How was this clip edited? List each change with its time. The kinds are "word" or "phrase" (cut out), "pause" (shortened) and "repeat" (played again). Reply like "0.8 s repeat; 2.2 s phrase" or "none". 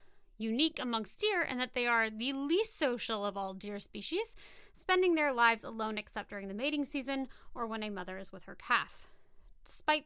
none